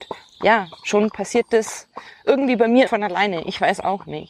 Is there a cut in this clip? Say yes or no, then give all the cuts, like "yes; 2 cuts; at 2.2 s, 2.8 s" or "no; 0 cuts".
yes; 1 cut; at 2.9 s